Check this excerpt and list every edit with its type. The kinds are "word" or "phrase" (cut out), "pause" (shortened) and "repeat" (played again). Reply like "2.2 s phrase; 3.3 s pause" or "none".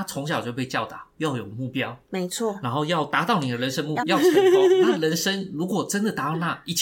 4.0 s phrase